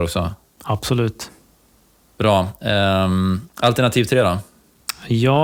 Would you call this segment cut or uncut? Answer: uncut